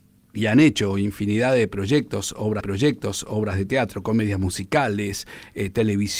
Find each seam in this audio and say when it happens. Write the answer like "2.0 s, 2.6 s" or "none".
2.6 s

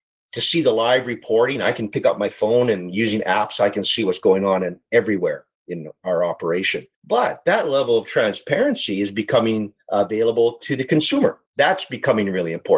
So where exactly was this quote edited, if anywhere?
6.9 s, 11.5 s

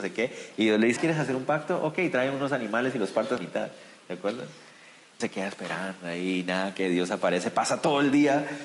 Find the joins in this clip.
1.0 s, 3.4 s, 5.2 s

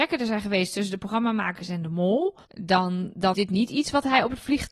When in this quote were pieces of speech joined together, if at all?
2.4 s, 3.3 s

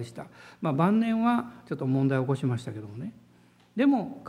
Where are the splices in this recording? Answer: none

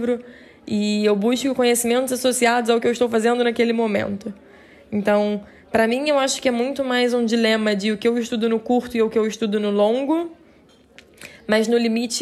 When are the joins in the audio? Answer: none

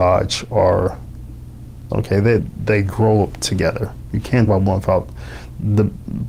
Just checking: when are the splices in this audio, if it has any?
1.9 s, 2.4 s, 4.5 s

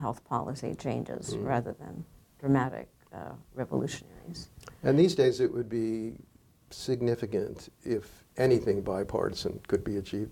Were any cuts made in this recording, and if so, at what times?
none

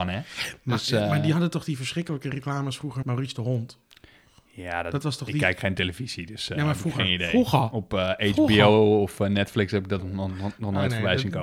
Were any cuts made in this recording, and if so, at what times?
3.0 s

